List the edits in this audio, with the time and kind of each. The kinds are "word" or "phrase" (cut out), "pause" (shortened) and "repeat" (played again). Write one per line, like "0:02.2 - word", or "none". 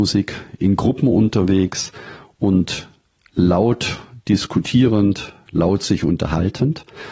none

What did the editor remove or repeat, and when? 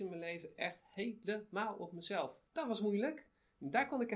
0:02.5 - pause

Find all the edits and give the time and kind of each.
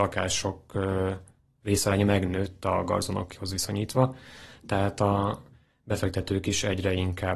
none

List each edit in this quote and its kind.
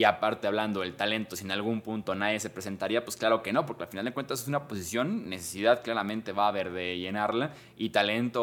none

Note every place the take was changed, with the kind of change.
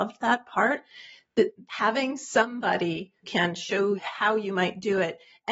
0:01.7 - word
0:03.2 - word
0:04.0 - word

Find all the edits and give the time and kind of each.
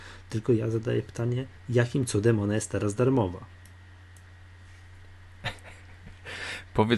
0:01.6 - pause

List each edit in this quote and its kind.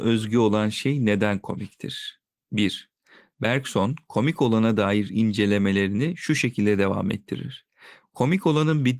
none

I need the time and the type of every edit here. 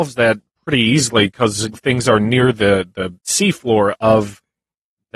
0:01.7 - phrase
0:03.2 - pause

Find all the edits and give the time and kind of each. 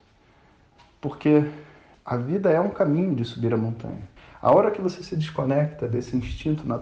0:01.9 - pause
0:04.2 - pause

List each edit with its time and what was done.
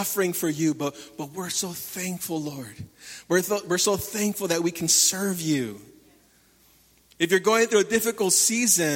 none

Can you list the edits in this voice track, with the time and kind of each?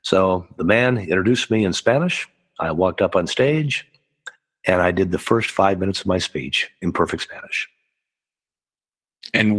none

